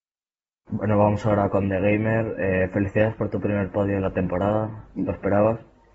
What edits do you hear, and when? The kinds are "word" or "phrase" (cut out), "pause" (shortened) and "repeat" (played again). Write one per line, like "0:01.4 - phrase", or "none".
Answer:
none

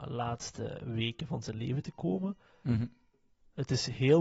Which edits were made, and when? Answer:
none

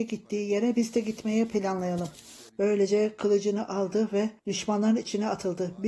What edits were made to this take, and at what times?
0:02.5 - pause
0:04.4 - pause

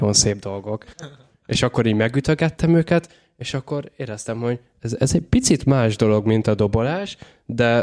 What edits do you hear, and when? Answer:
0:00.9 - pause

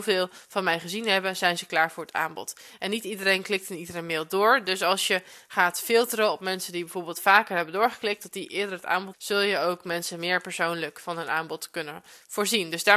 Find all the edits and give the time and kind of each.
0:09.1 - word

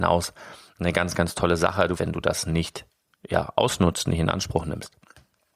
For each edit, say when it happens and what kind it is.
0:02.0 - phrase

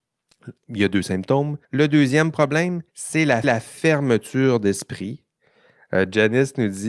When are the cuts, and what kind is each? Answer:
0:01.6 - pause
0:02.9 - pause
0:03.4 - repeat

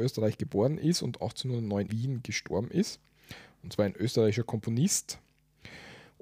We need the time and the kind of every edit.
0:01.9 - word

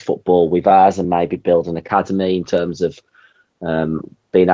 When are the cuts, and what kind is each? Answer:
none

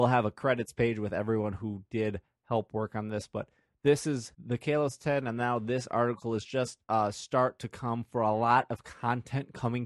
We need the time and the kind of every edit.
0:04.3 - pause
0:06.8 - pause

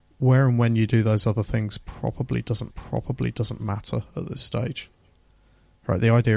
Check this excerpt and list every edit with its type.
0:02.7 - repeat

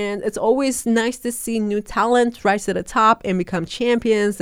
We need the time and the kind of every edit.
none

